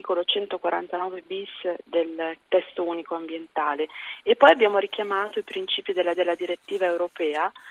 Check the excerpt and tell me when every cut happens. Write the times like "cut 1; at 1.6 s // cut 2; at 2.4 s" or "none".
cut 1; at 6.1 s